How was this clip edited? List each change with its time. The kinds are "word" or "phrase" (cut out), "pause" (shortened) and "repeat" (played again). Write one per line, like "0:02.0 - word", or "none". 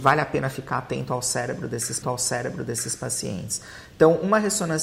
0:02.0 - repeat

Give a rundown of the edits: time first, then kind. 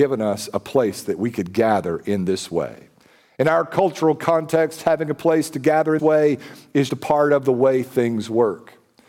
0:06.0 - word
0:06.9 - word

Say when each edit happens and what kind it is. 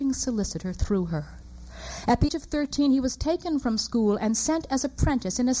0:02.3 - word

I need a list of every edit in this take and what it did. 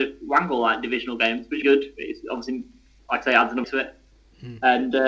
0:01.6 - word
0:03.6 - word

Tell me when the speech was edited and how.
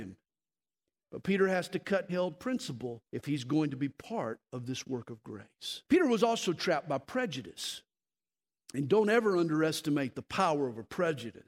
0:02.1 - phrase
0:03.1 - pause
0:05.8 - pause

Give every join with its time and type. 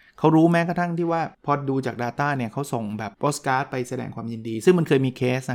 0:01.3 - pause
0:03.1 - pause

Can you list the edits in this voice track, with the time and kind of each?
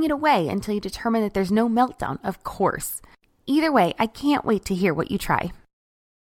none

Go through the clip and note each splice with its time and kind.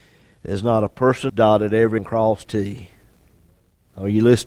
0:01.3 - phrase
0:02.0 - word
0:02.4 - word

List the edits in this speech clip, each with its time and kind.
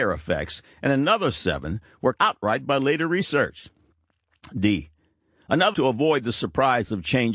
0:02.1 - word
0:05.7 - word

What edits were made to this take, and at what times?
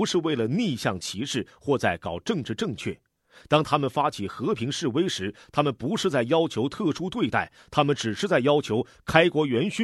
none

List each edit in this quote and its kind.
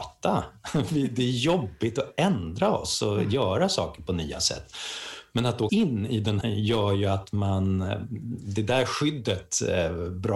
0:05.7 - word
0:06.4 - phrase

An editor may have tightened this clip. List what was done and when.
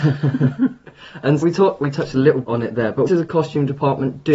0:01.4 - word
0:02.4 - word
0:03.1 - word

